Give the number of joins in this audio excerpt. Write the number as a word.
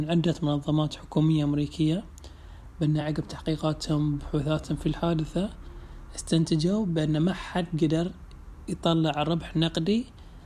zero